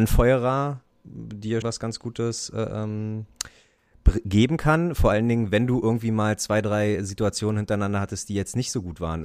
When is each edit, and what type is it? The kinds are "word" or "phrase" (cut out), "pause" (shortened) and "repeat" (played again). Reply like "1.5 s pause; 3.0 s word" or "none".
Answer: 1.6 s word

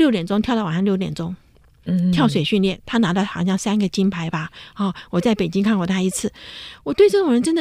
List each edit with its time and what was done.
none

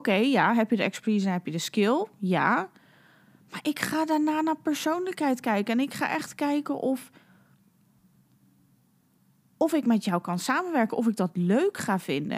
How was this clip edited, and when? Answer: none

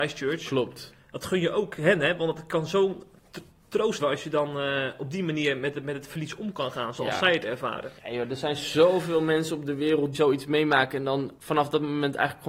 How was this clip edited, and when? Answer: 1.0 s pause; 4.0 s word; 8.0 s pause; 10.1 s word; 11.4 s pause

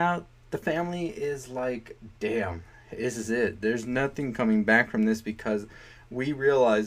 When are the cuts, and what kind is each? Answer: none

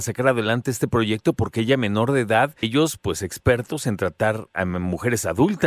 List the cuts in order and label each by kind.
2.6 s word

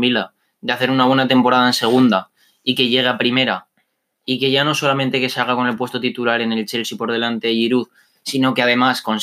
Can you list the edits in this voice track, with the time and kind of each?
none

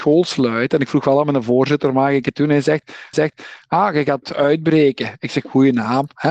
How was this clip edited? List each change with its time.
3.1 s repeat

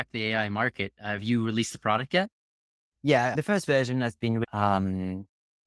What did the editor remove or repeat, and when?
none

